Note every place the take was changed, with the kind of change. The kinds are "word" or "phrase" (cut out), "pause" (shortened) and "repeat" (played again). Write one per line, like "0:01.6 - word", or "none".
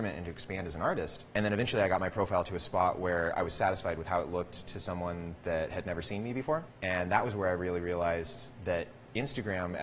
none